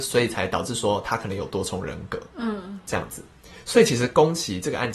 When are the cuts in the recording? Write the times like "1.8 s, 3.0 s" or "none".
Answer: none